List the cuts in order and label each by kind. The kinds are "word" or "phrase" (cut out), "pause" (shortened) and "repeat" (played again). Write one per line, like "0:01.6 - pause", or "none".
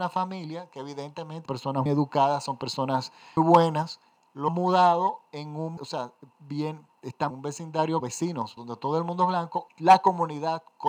0:01.5 - word
0:01.9 - word
0:03.4 - word
0:04.5 - word
0:05.8 - word
0:07.3 - word
0:08.0 - word
0:08.6 - word
0:09.7 - word

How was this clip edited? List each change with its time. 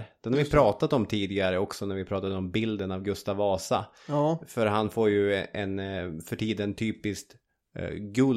none

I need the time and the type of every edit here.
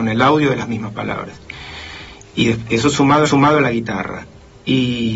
0:03.3 - repeat

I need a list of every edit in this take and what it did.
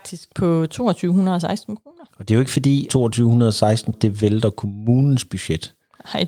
0:02.1 - pause
0:02.9 - word
0:03.9 - word

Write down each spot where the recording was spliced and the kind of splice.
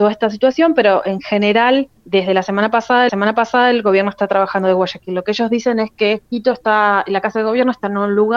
0:02.0 - pause
0:03.1 - repeat
0:06.3 - pause

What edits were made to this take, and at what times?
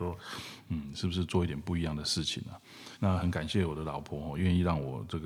0:02.9 - pause

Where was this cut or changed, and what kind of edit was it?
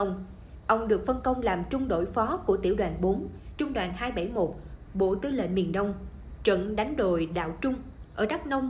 none

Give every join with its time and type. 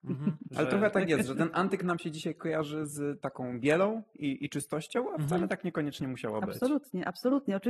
none

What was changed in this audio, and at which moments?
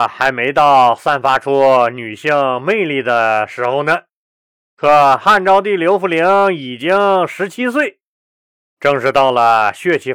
none

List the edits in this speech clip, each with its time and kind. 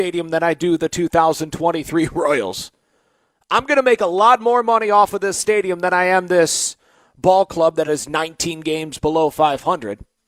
none

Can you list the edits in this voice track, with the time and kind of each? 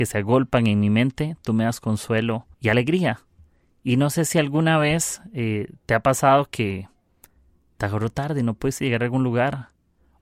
0:02.5 - pause

